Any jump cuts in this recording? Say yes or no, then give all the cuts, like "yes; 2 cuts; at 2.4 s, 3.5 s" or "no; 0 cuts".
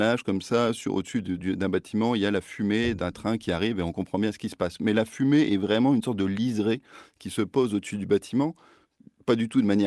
no; 0 cuts